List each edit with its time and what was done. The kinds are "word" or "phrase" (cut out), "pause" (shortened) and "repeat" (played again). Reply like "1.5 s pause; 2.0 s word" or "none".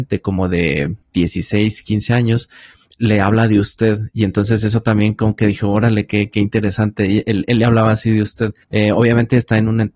1.0 s pause; 8.6 s pause